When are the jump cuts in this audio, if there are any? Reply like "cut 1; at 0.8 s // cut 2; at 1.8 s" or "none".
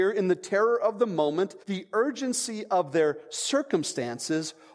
cut 1; at 1.6 s

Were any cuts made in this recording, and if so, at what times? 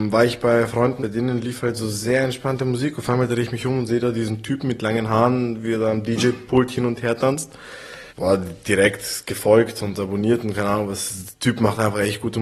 cut 1; at 1.0 s // cut 2; at 8.1 s

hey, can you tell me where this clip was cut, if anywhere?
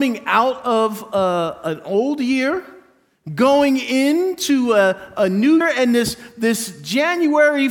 cut 1; at 5.6 s

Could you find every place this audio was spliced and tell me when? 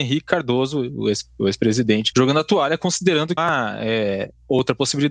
cut 1; at 2.1 s // cut 2; at 3.4 s

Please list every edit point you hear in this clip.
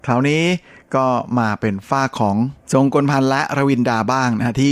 cut 1; at 2.6 s

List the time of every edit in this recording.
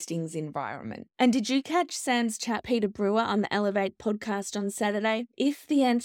cut 1; at 2.6 s

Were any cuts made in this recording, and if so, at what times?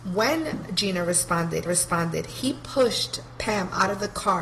cut 1; at 1.7 s

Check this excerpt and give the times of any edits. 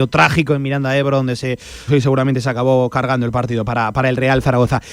cut 1; at 1.9 s

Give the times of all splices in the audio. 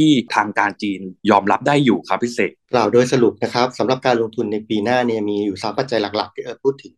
cut 1; at 2.6 s

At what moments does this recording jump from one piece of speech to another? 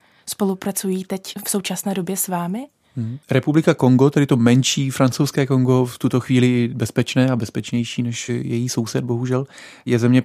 cut 1; at 3.2 s

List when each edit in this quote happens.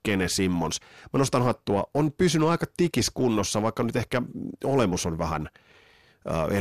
none

